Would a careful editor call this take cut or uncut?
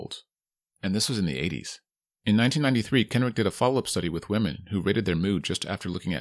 uncut